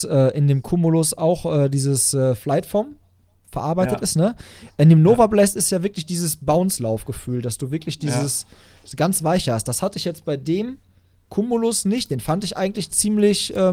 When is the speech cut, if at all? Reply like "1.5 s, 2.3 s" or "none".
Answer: none